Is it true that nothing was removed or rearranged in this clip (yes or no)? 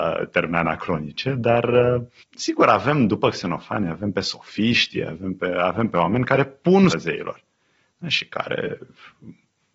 no